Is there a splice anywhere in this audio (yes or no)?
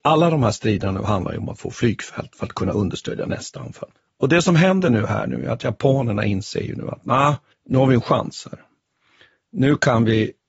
yes